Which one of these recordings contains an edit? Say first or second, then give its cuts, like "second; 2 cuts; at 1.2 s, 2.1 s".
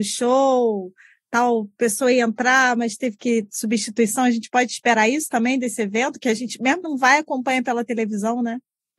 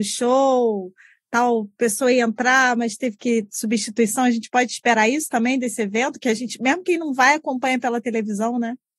first; 1 cut; at 6.8 s